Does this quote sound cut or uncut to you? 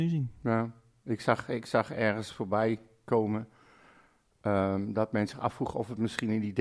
uncut